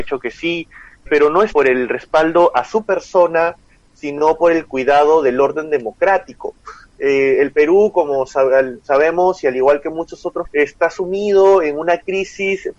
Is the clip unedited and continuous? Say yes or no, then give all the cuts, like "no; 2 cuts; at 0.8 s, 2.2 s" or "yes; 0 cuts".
no; 3 cuts; at 1.1 s, 1.5 s, 10.4 s